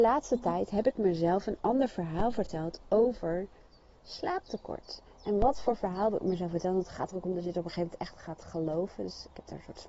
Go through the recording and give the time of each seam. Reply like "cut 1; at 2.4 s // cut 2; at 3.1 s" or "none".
none